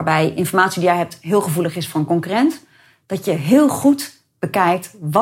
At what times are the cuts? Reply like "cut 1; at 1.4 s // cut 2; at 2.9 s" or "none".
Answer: none